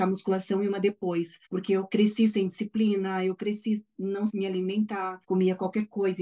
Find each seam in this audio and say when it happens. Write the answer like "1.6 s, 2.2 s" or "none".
1.5 s, 4.3 s, 5.2 s